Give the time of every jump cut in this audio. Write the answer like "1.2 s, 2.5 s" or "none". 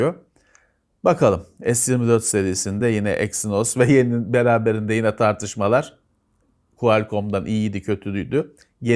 none